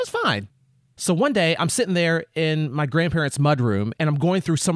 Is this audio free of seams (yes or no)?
yes